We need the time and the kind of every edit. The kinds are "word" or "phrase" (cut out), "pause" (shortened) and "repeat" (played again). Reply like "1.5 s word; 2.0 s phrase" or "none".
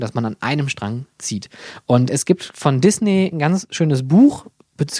2.1 s word

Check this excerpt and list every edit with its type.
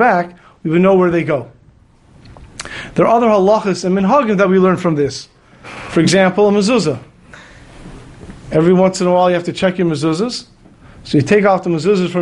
none

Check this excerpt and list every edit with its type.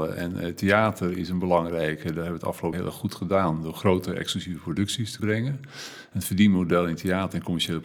2.7 s word; 5.2 s word

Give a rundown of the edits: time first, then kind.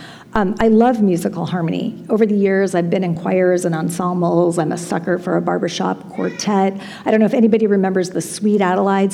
none

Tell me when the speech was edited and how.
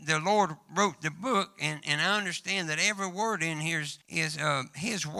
4.0 s pause

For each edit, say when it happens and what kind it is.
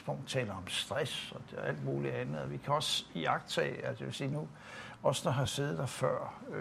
none

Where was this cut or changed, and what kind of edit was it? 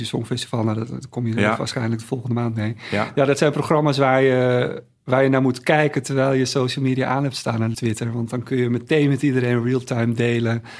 7.7 s word

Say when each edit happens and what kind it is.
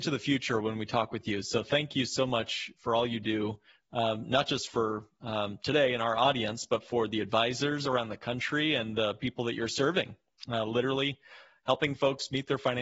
none

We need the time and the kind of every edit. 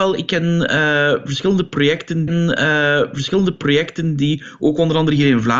2.3 s repeat

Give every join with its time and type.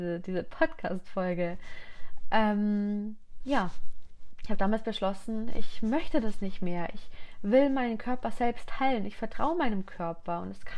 none

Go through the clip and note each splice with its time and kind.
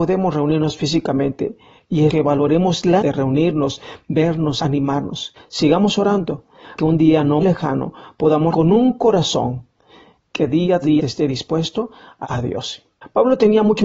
2.1 s word; 3.0 s word; 4.6 s word; 6.8 s word; 7.4 s word; 8.5 s word; 10.8 s word; 12.2 s word

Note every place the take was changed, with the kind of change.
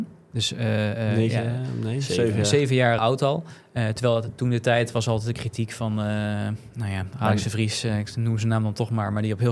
3.0 s word

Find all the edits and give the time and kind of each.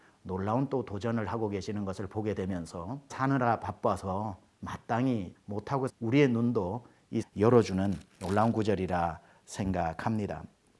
3.1 s word; 5.3 s word; 5.9 s word; 7.2 s word

